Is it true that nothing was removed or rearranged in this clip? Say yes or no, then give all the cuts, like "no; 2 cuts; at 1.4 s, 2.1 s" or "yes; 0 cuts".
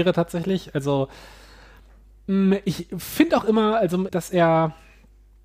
no; 1 cut; at 4.1 s